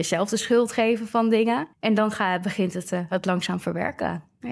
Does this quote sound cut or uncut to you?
cut